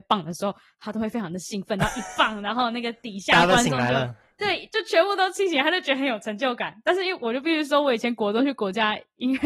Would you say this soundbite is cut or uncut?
uncut